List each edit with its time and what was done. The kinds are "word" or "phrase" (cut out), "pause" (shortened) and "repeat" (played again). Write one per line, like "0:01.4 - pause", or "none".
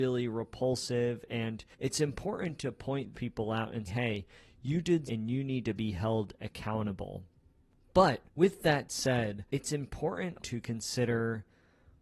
0:01.7 - pause
0:03.1 - word
0:03.9 - word
0:05.0 - phrase
0:08.3 - pause
0:09.5 - pause
0:10.4 - word